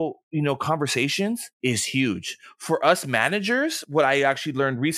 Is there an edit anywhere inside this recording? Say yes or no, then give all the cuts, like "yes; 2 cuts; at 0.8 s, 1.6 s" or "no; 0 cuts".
yes; 1 cut; at 1.6 s